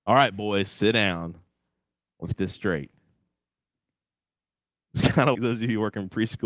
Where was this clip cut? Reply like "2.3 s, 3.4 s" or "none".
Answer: 2.3 s, 5.3 s